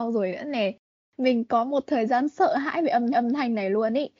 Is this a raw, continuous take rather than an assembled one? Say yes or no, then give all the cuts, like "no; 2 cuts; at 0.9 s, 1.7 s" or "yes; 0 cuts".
no; 1 cut; at 3.1 s